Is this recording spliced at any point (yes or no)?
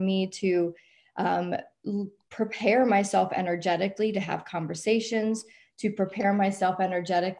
no